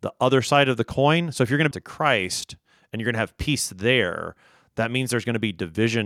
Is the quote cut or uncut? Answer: cut